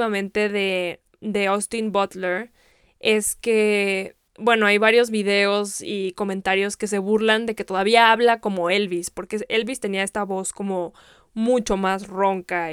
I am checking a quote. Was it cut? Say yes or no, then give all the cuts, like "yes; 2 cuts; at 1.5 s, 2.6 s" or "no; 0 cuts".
no; 0 cuts